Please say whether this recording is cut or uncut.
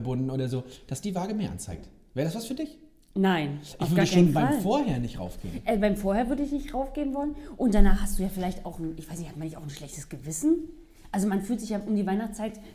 uncut